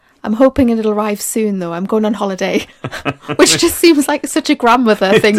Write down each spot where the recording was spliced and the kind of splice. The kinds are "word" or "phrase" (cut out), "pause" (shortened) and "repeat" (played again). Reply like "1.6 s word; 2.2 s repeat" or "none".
none